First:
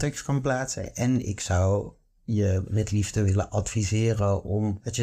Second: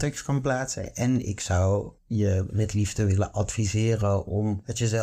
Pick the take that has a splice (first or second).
second